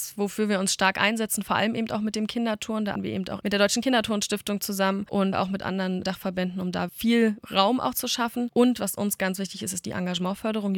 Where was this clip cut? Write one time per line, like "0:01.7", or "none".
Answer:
0:03.0
0:03.4
0:05.3
0:06.9